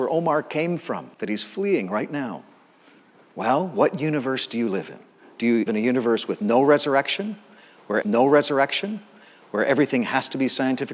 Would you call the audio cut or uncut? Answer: cut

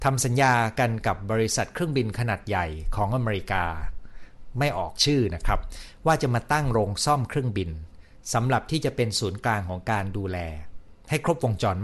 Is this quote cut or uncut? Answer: uncut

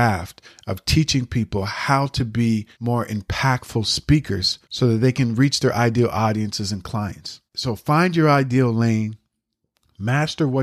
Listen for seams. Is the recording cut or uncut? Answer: cut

